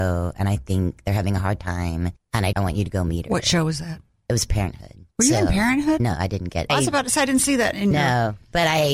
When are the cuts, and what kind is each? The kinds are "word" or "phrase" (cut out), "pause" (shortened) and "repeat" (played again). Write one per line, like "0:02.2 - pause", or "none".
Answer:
0:02.2 - pause
0:02.5 - word
0:05.1 - pause
0:06.7 - phrase

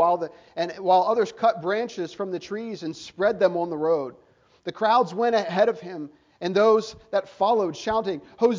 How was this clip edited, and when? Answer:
none

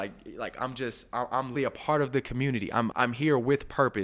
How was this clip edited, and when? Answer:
0:01.6 - word
0:02.9 - word

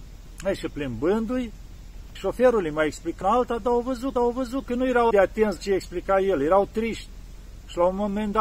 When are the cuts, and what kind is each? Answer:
0:02.2 - word
0:03.2 - word
0:04.2 - repeat
0:05.1 - word
0:05.6 - word

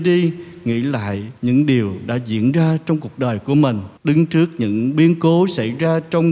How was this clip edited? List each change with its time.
0:01.4 - pause
0:04.0 - pause

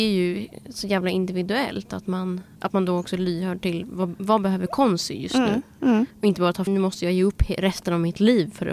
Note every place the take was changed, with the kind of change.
0:06.1 - pause
0:06.7 - phrase

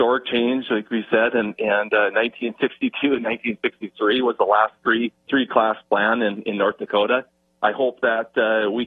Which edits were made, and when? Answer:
0:05.2 - pause

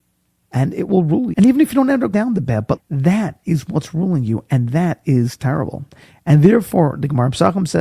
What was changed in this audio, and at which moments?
0:01.3 - word
0:02.1 - word
0:02.8 - word

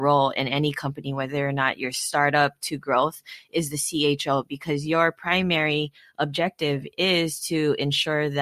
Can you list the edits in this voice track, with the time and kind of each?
none

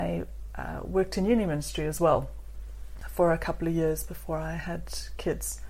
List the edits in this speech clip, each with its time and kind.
none

